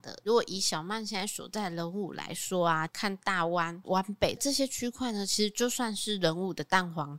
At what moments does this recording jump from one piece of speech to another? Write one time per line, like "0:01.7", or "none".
0:03.8